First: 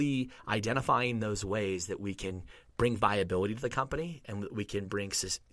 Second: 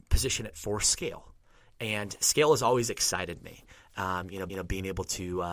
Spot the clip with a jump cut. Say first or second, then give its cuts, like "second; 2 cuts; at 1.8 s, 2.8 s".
second; 1 cut; at 4.5 s